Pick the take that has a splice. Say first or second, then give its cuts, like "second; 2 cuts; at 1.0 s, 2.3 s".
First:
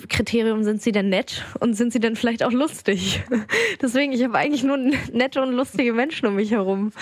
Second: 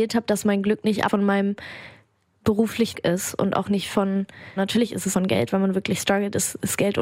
second; 4 cuts; at 1.1 s, 2.9 s, 4.6 s, 5.1 s